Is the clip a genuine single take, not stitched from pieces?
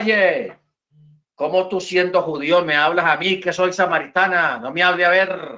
yes; 0 cuts

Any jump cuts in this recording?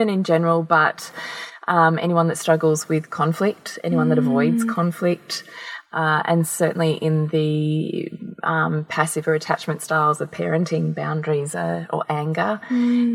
no; 0 cuts

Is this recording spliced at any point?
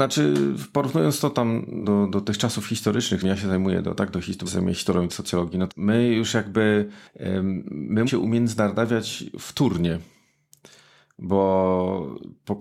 yes; 6 cuts; at 1.8 s, 3.2 s, 4.5 s, 5.1 s, 5.7 s, 8.1 s

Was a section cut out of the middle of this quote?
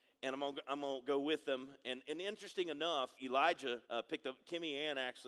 yes; 2 cuts; at 3.2 s, 3.8 s

